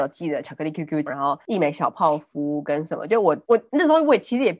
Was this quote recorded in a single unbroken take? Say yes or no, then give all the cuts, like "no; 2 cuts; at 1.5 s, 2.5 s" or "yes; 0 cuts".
no; 1 cut; at 1.1 s